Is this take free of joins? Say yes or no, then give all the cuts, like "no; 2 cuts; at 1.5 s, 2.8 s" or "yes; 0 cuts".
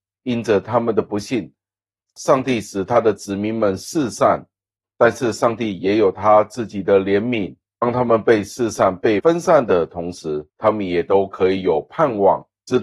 no; 1 cut; at 10.5 s